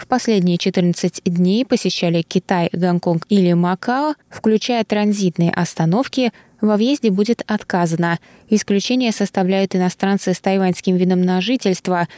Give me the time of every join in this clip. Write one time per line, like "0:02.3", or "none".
none